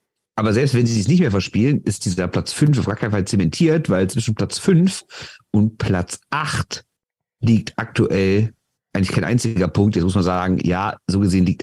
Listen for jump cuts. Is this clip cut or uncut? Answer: uncut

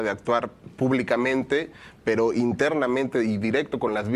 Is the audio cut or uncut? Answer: uncut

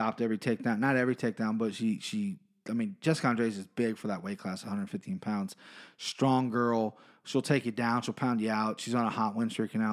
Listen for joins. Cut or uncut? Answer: uncut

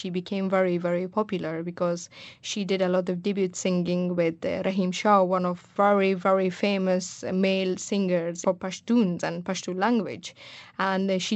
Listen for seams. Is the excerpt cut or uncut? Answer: uncut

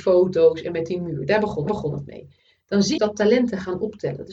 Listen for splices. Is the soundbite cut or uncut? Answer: cut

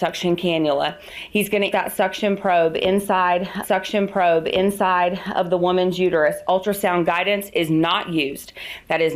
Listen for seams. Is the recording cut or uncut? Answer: cut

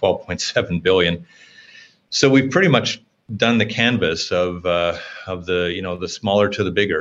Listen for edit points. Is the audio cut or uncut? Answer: uncut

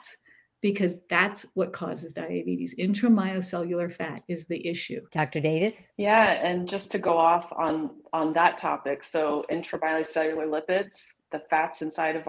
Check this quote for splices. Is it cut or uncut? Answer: uncut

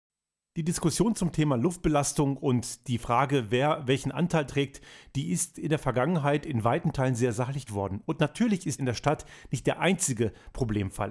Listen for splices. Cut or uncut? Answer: cut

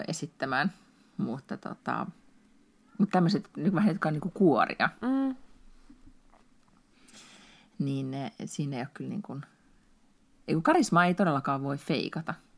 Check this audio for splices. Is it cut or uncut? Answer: uncut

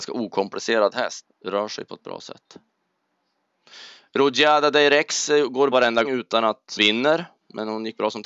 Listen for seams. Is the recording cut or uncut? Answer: cut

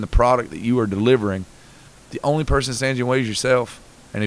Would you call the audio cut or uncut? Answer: uncut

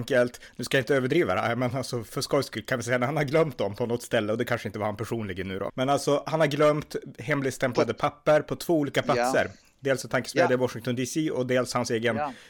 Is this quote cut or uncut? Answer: cut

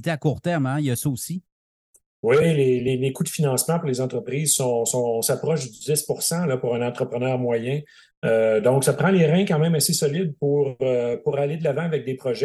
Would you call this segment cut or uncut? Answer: uncut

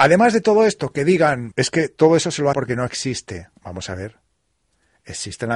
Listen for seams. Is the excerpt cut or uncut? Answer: cut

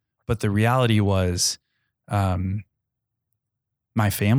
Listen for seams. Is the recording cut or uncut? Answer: uncut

